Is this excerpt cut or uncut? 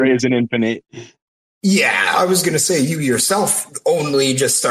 uncut